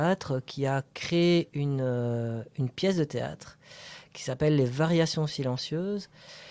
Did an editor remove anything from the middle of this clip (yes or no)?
no